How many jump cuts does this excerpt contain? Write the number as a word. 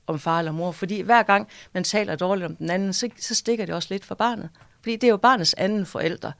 zero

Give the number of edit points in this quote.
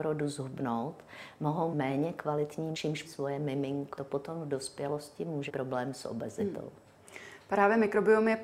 five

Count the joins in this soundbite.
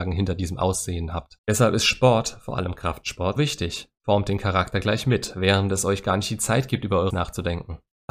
two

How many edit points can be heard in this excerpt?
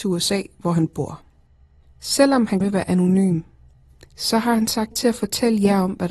two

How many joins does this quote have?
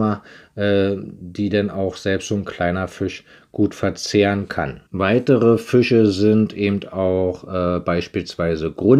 one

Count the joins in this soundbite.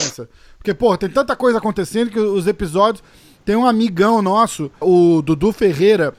one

